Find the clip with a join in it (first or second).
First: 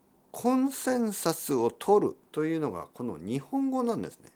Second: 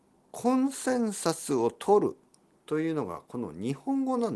first